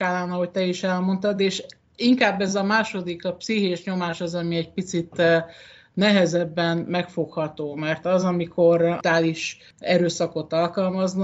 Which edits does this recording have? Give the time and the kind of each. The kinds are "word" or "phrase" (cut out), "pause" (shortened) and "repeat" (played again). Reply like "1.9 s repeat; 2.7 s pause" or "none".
none